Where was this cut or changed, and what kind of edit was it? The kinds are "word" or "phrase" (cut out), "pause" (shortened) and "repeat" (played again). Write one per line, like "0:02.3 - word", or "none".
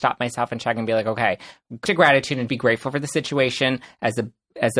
0:01.8 - word
0:02.5 - word

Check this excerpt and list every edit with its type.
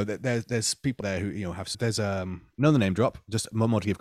0:01.0 - word
0:01.7 - word

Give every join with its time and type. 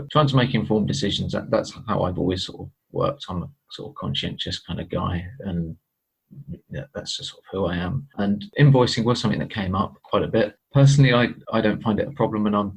none

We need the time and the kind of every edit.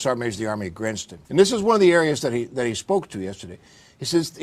0:01.2 - pause

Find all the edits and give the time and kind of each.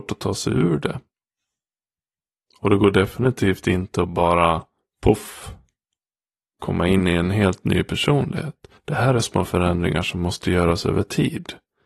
0:08.8 - pause
0:09.2 - word

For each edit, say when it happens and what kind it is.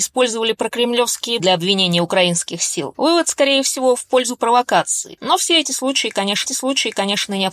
0:01.4 - word
0:06.5 - repeat

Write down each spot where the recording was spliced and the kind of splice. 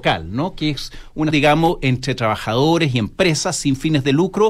0:01.3 - word

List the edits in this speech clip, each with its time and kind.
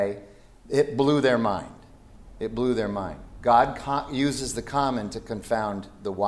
none

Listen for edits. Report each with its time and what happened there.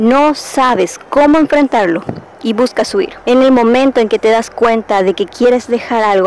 none

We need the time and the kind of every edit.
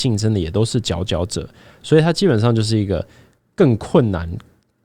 none

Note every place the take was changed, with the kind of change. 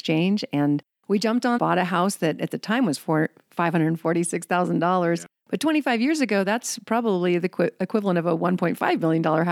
0:01.6 - phrase

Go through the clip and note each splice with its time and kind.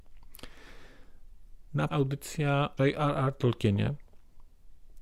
0:01.9 - phrase
0:02.8 - word

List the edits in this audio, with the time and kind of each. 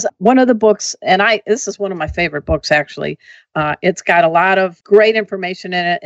none

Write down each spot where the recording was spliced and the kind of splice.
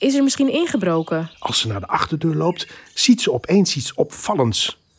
0:01.3 - pause

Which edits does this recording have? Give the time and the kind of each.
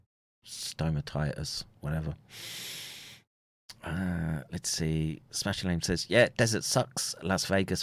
none

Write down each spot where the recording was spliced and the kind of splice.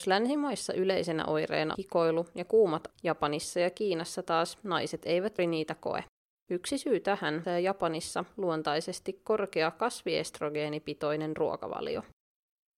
0:01.7 - word
0:02.9 - word
0:05.4 - word
0:06.1 - pause
0:07.4 - phrase

